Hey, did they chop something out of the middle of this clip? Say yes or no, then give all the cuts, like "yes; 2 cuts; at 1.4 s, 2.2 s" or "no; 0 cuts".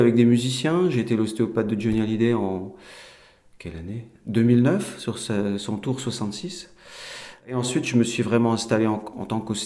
no; 0 cuts